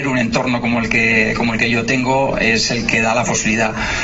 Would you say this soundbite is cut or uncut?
uncut